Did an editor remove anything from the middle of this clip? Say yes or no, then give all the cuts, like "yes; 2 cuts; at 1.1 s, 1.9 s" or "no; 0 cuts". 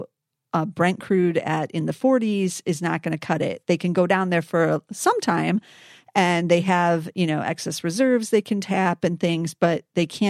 no; 0 cuts